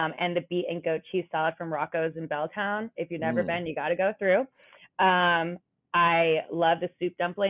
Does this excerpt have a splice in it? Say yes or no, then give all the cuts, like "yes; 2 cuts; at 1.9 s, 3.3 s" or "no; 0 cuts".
no; 0 cuts